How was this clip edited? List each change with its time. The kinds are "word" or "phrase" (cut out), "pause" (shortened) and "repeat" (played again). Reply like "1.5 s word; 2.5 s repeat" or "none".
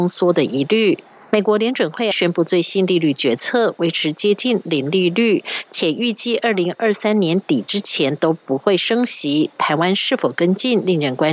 2.1 s word